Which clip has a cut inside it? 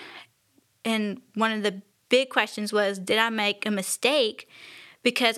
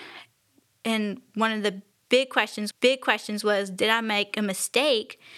second; 1 cut; at 2.7 s

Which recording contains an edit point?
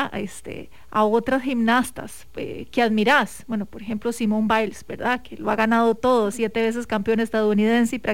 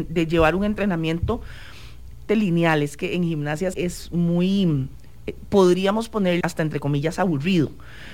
second; 3 cuts; at 2.3 s, 3.7 s, 6.4 s

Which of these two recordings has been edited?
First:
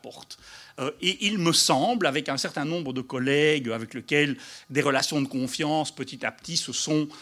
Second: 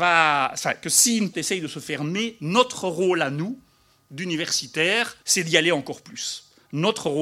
second; 2 cuts; at 1.3 s, 5.2 s

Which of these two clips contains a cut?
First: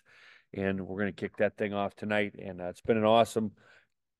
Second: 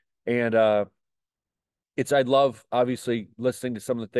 second; 1 cut; at 2.1 s

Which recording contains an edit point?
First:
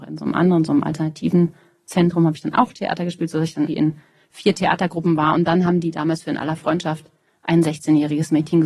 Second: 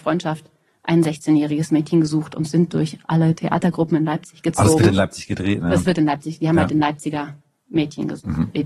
first; 1 cut; at 3.7 s

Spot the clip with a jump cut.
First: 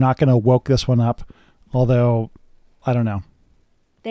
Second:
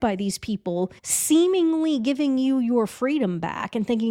second; 1 cut; at 1.0 s

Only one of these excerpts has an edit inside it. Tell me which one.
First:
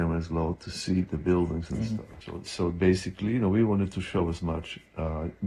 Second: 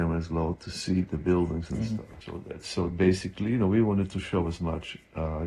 first; 1 cut; at 2.4 s

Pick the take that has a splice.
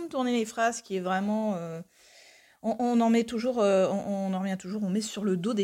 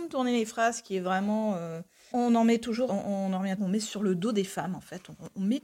second; 3 cuts; at 2.1 s, 2.9 s, 3.6 s

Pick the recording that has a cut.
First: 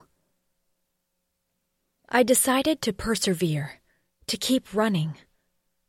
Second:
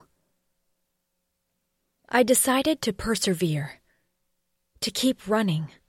first; 1 cut; at 4.1 s

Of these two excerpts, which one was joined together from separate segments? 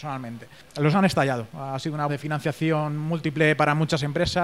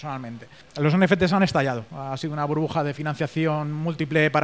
first; 2 cuts; at 0.9 s, 2.1 s

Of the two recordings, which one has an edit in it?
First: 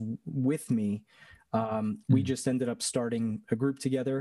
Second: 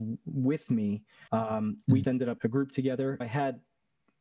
second; 4 cuts; at 1.3 s, 2.0 s, 2.4 s, 3.2 s

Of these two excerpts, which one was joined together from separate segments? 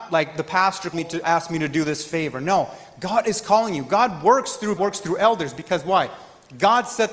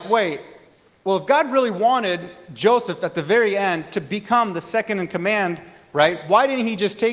first; 3 cuts; at 0.9 s, 1.2 s, 4.8 s

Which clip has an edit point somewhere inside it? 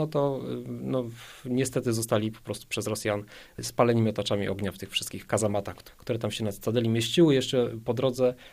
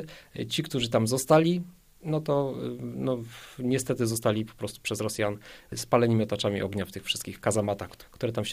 second; 1 cut; at 1.8 s

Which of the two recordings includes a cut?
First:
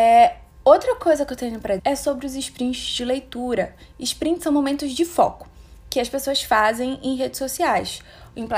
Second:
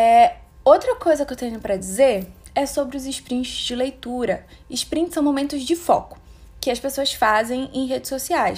first; 1 cut; at 1.8 s

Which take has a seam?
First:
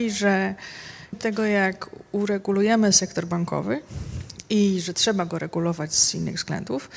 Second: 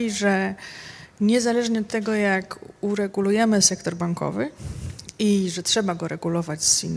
first; 1 cut; at 1.1 s

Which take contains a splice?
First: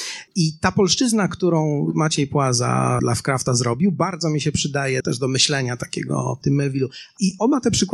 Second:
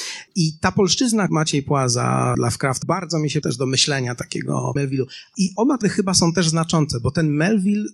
second; 5 cuts; at 1.3 s, 2.8 s, 3.4 s, 4.8 s, 5.8 s

